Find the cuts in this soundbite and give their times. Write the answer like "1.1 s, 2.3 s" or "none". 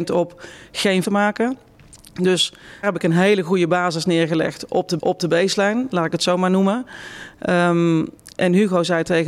1.0 s, 2.8 s, 5.0 s